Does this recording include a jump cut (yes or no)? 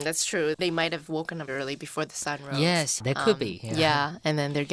yes